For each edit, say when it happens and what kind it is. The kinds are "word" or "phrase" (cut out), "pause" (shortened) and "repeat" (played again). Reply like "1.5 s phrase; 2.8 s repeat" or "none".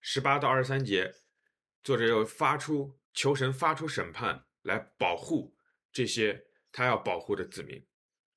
3.0 s pause